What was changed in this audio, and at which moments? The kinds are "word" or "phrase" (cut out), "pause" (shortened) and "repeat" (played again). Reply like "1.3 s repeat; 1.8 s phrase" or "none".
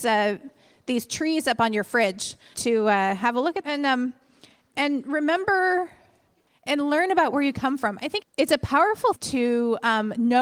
2.5 s word; 3.6 s word; 8.2 s word; 9.1 s word